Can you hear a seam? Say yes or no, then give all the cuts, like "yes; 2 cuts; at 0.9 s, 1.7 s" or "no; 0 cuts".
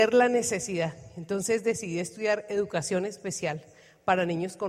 no; 0 cuts